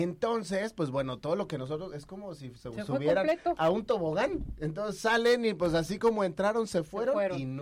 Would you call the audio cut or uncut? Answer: uncut